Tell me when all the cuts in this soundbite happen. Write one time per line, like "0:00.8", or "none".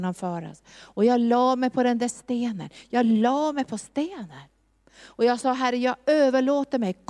none